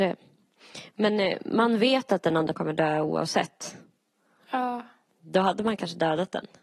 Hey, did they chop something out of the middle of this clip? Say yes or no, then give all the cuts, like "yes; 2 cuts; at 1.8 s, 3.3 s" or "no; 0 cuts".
yes; 1 cut; at 2.5 s